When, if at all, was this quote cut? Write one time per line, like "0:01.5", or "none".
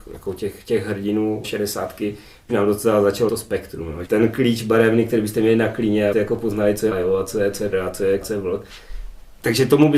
0:01.4
0:02.5
0:03.3
0:04.0
0:06.1
0:06.9
0:07.7
0:08.2